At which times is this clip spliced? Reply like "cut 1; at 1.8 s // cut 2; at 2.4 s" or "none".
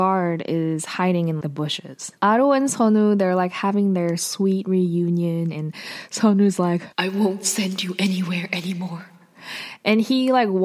cut 1; at 1.4 s // cut 2; at 2.2 s // cut 3; at 6.9 s